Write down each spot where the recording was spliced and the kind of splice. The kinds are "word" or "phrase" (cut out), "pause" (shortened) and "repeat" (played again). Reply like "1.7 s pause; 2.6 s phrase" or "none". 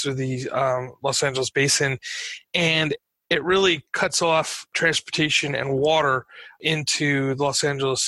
none